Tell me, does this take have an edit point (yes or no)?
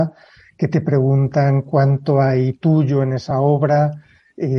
no